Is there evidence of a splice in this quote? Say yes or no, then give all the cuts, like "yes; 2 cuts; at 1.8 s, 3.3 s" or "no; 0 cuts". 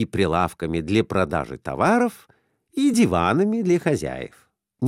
no; 0 cuts